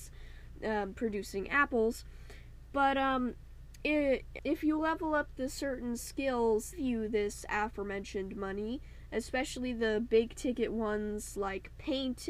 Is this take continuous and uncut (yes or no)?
no